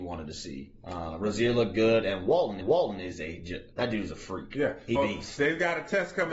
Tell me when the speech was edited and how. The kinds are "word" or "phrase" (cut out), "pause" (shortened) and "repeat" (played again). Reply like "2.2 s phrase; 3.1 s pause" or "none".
2.6 s repeat; 3.7 s pause; 5.0 s word